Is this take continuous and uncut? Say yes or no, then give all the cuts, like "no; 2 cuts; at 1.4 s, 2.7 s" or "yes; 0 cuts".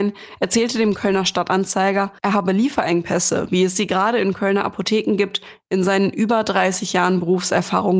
no; 1 cut; at 2.2 s